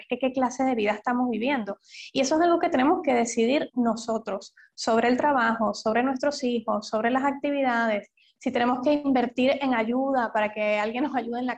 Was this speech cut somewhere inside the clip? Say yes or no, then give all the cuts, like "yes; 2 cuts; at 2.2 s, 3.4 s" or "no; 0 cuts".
no; 0 cuts